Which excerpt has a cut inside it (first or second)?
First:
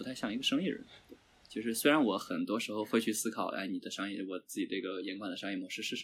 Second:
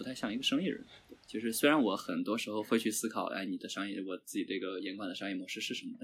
second